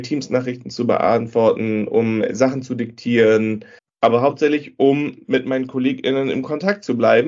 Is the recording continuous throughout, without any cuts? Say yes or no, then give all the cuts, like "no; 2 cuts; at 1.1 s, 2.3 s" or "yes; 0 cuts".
no; 1 cut; at 3.8 s